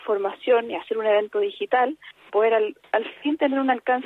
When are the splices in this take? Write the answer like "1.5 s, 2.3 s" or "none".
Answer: 2.3 s